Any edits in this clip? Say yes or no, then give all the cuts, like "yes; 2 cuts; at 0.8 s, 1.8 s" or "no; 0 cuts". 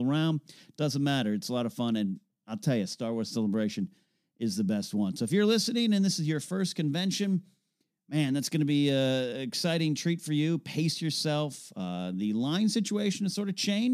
no; 0 cuts